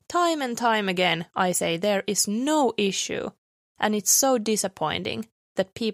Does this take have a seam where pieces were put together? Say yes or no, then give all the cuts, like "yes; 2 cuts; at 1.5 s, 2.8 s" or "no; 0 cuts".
no; 0 cuts